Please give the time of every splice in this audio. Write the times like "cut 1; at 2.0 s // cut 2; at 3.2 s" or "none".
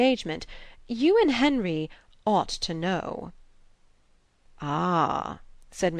none